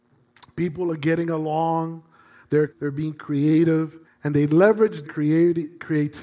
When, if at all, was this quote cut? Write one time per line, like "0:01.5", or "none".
0:02.7
0:04.0
0:05.0